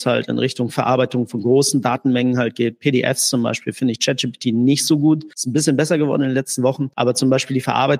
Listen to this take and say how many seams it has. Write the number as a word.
zero